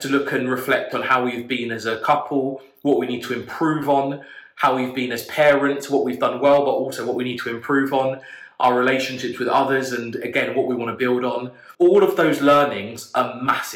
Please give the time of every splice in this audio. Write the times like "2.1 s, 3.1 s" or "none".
11.7 s